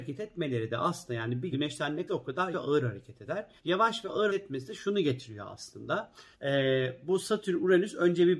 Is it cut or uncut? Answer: cut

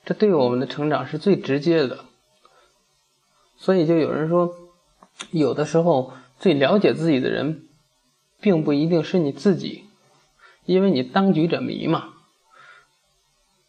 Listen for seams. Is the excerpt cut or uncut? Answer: uncut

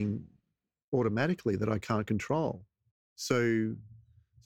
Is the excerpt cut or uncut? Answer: uncut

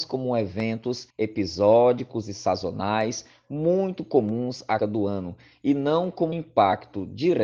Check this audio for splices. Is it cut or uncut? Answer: cut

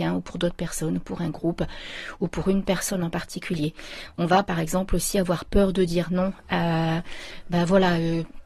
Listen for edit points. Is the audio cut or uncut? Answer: uncut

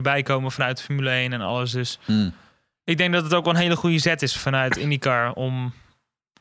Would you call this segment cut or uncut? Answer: uncut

